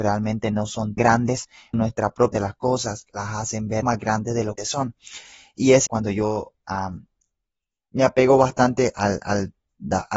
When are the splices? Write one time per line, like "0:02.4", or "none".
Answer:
0:01.0
0:01.7
0:02.3
0:03.8
0:04.6
0:05.9
0:08.9